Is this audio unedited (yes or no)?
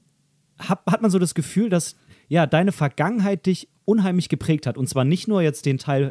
yes